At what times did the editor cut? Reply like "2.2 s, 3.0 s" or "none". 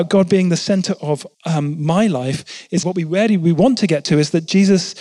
1.3 s, 2.8 s